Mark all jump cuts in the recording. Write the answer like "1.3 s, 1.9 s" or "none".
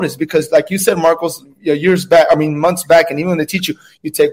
none